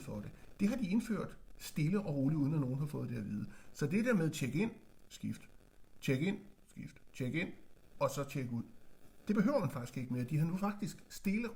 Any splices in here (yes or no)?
no